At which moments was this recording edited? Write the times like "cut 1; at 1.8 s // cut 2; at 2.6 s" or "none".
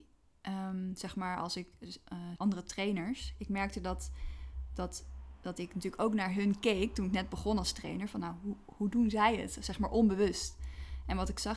cut 1; at 2.4 s